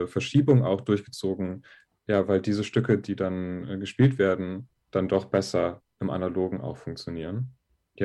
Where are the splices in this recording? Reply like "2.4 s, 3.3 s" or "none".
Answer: none

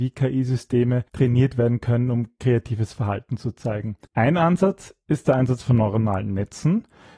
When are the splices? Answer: 1.1 s, 4.0 s

